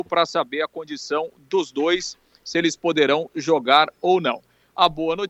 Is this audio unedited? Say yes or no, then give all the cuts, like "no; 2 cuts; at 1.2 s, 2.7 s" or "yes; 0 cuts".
yes; 0 cuts